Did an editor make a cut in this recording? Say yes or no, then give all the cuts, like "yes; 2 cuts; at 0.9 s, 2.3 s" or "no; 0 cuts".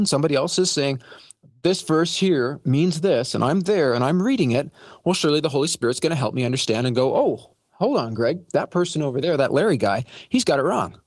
no; 0 cuts